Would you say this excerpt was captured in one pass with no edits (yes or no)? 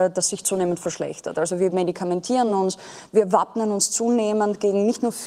yes